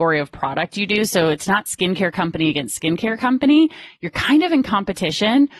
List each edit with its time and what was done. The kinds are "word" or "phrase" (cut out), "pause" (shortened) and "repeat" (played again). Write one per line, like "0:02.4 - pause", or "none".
none